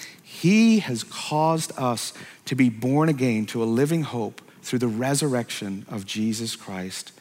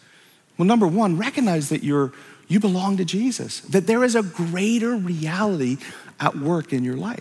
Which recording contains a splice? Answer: first; 1 cut; at 4.5 s

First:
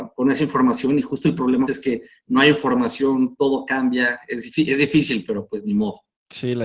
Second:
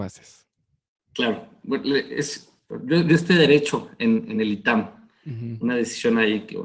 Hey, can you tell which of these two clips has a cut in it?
first; 1 cut; at 1.6 s

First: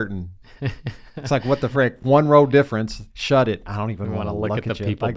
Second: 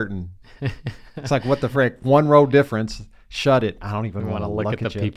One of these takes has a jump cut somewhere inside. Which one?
first; 1 cut; at 3.1 s

